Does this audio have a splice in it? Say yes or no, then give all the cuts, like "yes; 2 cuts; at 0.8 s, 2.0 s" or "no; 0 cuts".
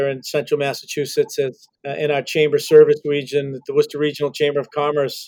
yes; 1 cut; at 1.8 s